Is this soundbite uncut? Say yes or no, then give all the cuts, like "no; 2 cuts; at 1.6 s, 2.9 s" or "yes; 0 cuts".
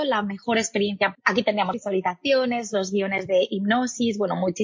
no; 2 cuts; at 1.1 s, 1.7 s